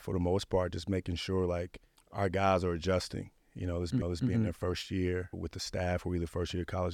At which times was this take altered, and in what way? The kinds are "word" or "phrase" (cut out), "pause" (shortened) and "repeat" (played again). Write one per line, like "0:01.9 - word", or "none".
0:01.9 - pause
0:04.0 - repeat
0:05.3 - word